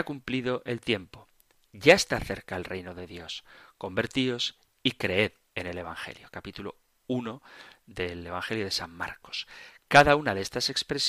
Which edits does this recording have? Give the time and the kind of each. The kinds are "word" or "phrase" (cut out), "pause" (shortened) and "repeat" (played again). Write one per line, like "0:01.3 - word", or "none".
none